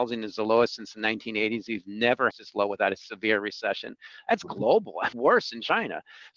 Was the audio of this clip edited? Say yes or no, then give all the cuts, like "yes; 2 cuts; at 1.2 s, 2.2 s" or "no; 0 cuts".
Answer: yes; 2 cuts; at 2.3 s, 5.1 s